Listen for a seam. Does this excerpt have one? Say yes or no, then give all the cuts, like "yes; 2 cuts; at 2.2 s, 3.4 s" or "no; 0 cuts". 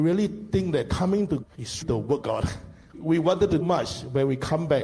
yes; 5 cuts; at 1.4 s, 1.8 s, 2.2 s, 2.9 s, 3.6 s